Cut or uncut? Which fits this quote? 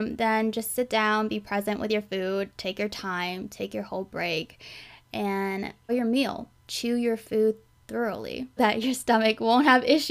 cut